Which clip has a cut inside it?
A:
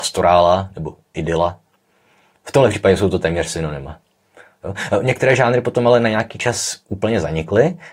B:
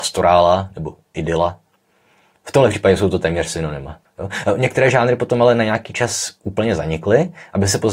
B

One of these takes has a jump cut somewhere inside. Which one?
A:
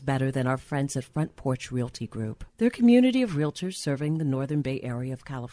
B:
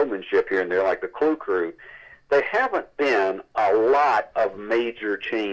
A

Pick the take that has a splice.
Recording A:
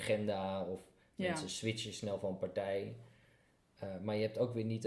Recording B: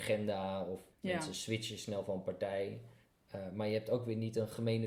B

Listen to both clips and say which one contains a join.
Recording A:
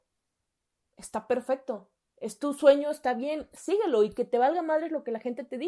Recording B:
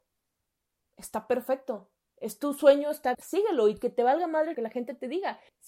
B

